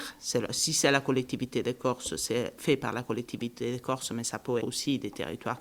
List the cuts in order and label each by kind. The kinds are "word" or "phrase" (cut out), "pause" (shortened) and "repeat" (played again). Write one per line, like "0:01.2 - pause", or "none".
0:04.6 - word